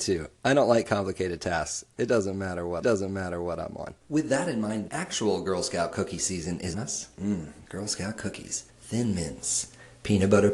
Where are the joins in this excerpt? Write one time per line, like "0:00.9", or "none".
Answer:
0:02.8
0:04.0
0:04.9
0:06.7
0:08.7